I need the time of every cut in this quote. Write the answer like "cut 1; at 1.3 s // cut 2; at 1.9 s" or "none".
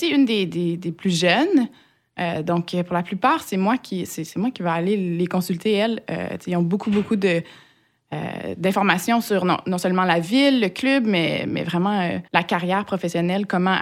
cut 1; at 12.3 s